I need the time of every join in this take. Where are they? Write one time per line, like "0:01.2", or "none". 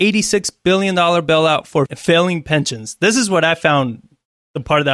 0:01.9